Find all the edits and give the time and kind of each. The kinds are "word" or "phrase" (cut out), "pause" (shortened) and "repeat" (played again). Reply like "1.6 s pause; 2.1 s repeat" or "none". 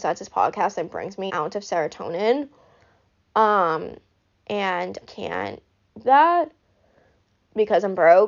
1.3 s word; 5.0 s word; 6.0 s word